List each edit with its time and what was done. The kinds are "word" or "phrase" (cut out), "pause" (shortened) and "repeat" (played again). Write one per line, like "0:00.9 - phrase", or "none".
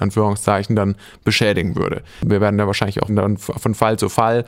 0:03.1 - word